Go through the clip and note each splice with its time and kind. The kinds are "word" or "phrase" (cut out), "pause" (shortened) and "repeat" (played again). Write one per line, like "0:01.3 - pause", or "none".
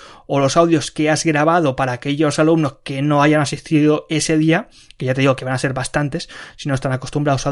none